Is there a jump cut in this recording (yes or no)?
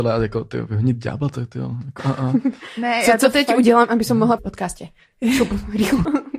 yes